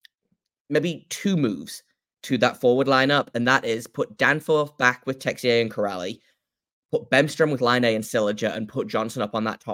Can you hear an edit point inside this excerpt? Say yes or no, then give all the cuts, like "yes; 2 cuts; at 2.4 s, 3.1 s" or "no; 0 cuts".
no; 0 cuts